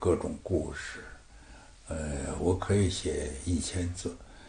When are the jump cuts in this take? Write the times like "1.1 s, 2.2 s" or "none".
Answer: none